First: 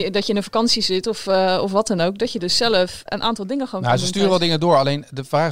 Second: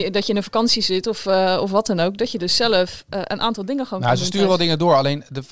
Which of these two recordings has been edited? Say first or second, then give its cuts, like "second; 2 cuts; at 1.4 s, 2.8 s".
first; 1 cut; at 3.1 s